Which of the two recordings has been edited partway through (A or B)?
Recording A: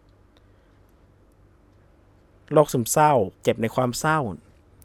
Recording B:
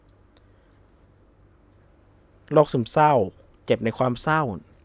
A